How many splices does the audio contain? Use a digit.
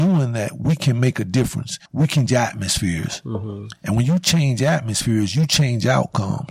2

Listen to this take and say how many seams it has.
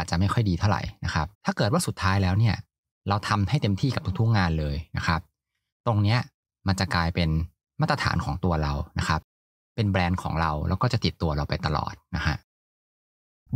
1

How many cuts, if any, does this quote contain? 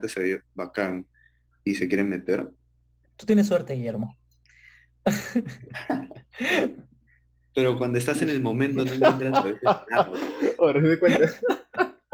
0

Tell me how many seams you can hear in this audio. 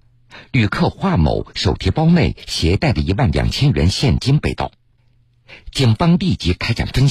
0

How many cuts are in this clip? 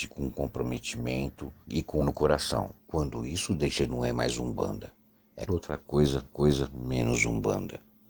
6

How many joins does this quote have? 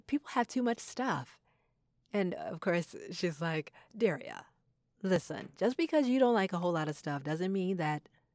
0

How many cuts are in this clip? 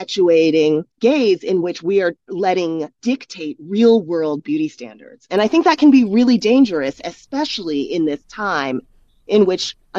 2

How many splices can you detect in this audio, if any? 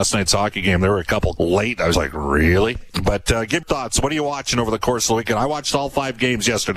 3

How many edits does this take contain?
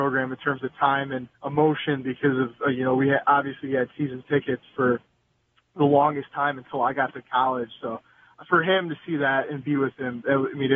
1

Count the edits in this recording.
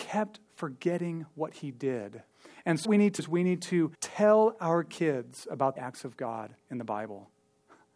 6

